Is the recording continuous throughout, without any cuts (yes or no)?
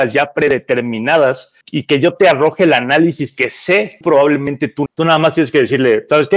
no